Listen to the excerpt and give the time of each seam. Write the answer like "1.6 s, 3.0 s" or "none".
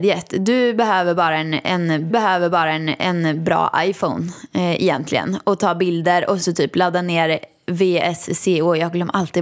2.1 s, 6.4 s